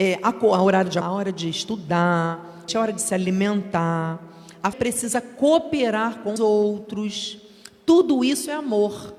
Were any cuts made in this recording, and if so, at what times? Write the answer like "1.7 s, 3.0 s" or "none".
1.0 s, 2.7 s, 4.7 s, 6.4 s